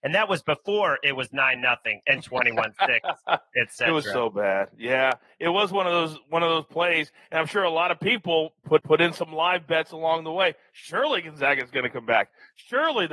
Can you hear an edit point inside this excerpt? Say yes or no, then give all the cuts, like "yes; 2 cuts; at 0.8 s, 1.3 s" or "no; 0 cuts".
yes; 1 cut; at 8.8 s